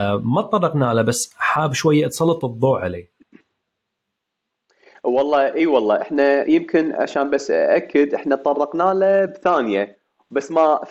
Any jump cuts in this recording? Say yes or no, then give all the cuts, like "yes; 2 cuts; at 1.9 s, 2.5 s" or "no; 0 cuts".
no; 0 cuts